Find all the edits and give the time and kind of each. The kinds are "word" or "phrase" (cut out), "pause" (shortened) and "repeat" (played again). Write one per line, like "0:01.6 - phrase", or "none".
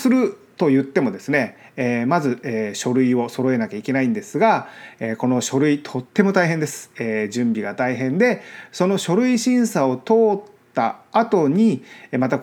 0:06.1 - pause